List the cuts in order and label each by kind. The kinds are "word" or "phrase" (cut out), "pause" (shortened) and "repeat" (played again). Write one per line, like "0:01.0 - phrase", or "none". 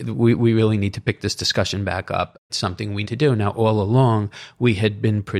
0:02.5 - word
0:03.0 - word